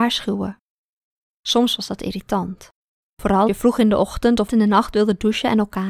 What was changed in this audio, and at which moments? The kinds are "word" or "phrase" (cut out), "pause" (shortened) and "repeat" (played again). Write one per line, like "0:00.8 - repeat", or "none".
0:03.5 - word
0:04.5 - word

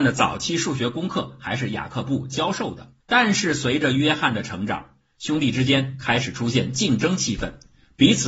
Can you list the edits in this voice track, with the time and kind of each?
0:03.0 - pause

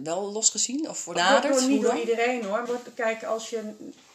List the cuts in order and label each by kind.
0:01.2 - phrase
0:02.7 - word

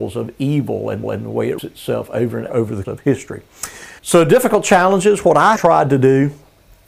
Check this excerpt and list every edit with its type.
0:01.0 - repeat
0:01.6 - word
0:02.5 - word
0:02.8 - word
0:04.0 - pause
0:05.6 - word

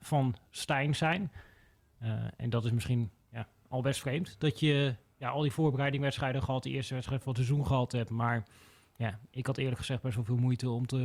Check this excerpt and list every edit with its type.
none

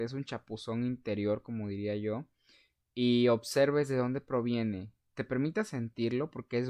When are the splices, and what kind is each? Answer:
none

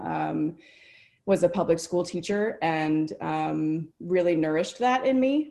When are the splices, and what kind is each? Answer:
0:03.9 - pause

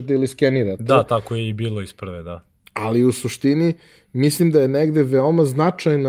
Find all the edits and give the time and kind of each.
none

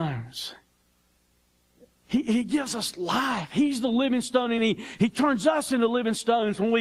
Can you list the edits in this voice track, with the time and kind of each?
none

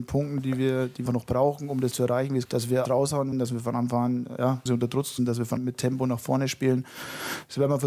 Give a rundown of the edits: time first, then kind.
0:01.1 - word
0:01.9 - word
0:02.4 - word
0:02.8 - word
0:03.3 - word
0:04.7 - word
0:05.2 - word
0:05.6 - word

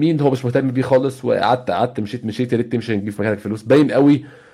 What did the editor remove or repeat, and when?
none

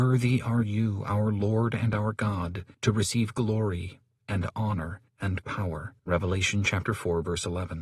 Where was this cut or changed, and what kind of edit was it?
0:02.7 - pause
0:05.1 - pause
0:06.0 - pause

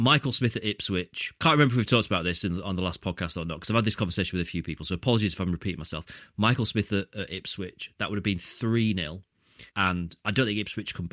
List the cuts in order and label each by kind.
0:01.4 - pause
0:09.7 - pause

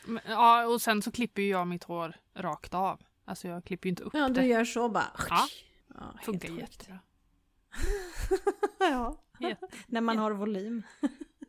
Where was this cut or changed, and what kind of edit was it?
none

